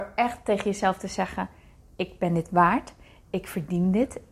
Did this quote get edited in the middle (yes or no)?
no